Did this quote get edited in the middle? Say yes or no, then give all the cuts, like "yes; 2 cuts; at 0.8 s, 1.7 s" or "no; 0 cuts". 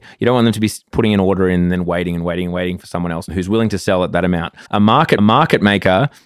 yes; 2 cuts; at 4.7 s, 5.2 s